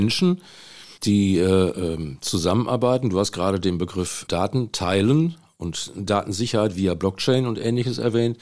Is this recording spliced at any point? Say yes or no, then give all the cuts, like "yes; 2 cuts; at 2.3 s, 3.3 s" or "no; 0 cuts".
yes; 1 cut; at 1.0 s